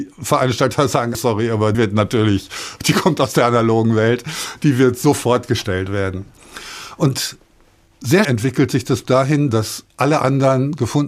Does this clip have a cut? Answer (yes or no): yes